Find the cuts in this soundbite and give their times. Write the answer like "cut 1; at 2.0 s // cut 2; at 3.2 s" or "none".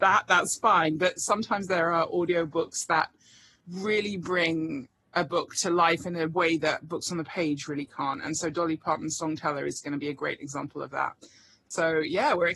none

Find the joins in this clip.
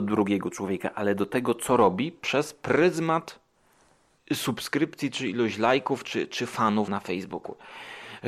cut 1; at 6.9 s

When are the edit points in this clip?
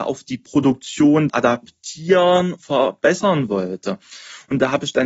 cut 1; at 1.3 s // cut 2; at 2.6 s

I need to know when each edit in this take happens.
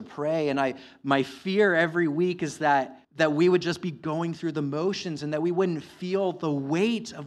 cut 1; at 3.0 s

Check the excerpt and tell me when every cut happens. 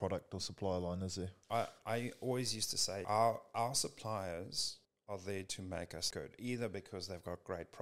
cut 1; at 1.4 s // cut 2; at 3.0 s // cut 3; at 4.8 s // cut 4; at 6.1 s

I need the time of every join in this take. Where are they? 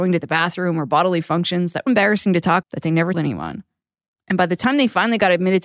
cut 1; at 1.9 s // cut 2; at 2.6 s // cut 3; at 3.1 s

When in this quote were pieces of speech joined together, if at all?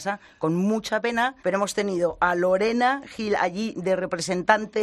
cut 1; at 1.4 s

